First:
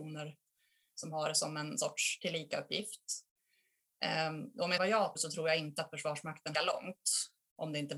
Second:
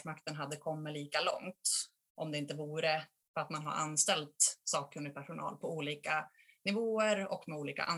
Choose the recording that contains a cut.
first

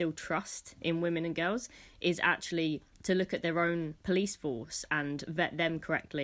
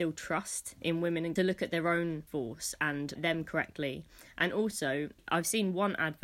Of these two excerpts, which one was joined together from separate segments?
second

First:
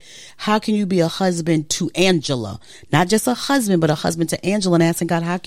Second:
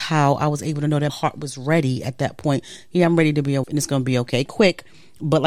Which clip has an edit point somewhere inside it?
second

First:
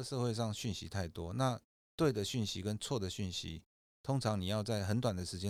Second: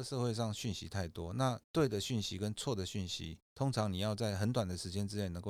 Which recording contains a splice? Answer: second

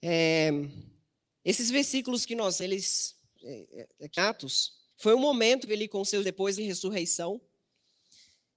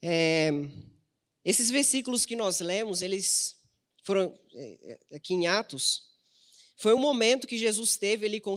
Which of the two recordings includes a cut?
first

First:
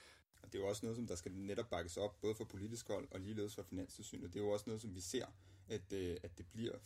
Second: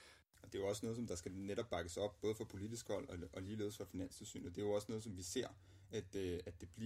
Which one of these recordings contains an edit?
first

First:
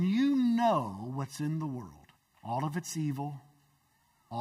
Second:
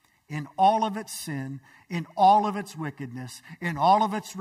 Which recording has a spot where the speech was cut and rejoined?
first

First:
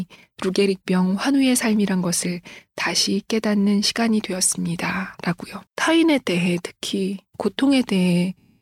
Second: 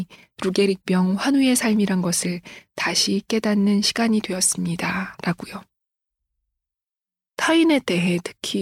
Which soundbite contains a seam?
first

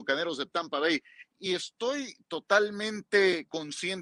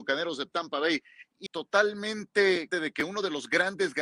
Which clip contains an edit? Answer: second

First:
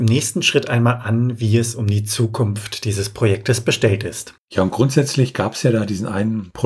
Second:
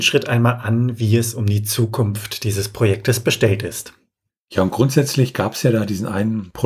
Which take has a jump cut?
first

